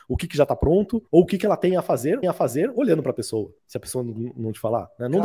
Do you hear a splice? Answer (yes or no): yes